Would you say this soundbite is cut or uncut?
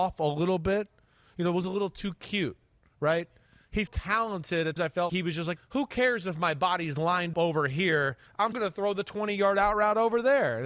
cut